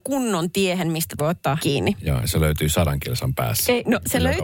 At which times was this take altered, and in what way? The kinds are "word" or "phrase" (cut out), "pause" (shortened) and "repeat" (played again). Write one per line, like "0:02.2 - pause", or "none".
0:01.2 - word
0:01.6 - word